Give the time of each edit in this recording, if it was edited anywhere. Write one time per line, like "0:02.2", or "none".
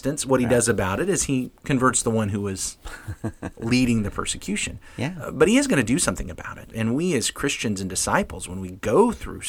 0:01.6